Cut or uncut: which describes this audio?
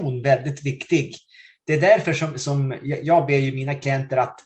uncut